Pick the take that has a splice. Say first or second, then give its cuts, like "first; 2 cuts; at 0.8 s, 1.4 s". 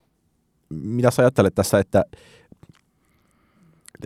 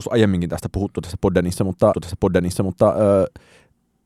second; 1 cut; at 1.9 s